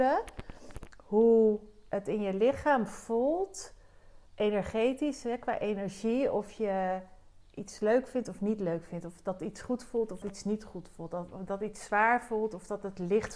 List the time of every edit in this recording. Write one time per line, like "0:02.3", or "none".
0:04.3
0:10.2